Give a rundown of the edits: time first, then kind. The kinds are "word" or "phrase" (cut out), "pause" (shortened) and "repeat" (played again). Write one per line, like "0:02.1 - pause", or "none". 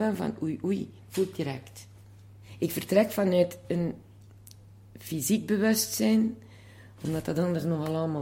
none